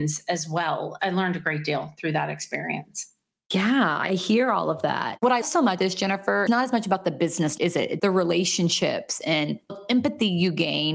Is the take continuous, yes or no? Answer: no